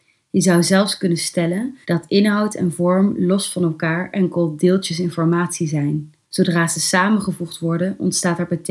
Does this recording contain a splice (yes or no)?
yes